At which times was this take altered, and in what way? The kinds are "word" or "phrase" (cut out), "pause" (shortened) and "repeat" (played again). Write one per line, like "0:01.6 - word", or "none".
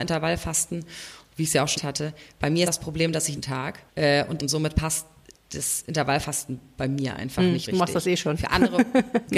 0:01.8 - phrase
0:02.6 - phrase
0:03.3 - phrase
0:03.9 - pause
0:04.4 - phrase
0:07.6 - word